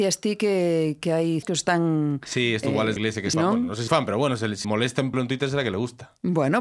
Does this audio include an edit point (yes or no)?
yes